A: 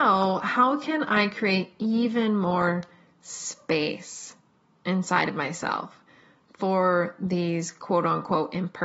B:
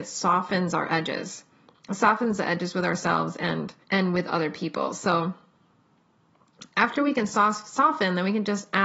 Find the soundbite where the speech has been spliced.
B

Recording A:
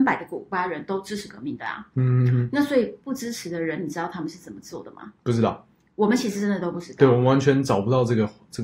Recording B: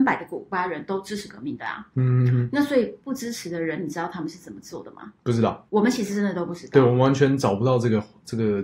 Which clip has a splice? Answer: B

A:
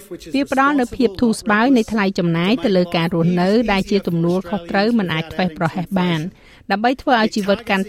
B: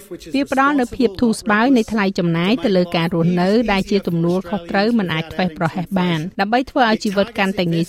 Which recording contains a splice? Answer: B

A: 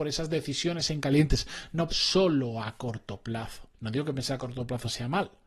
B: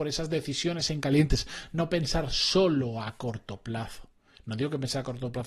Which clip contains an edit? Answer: A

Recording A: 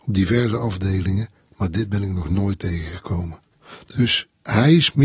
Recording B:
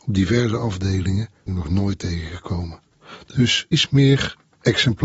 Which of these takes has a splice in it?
B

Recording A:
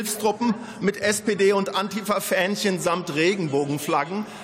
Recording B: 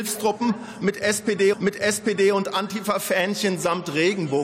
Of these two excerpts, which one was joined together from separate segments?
B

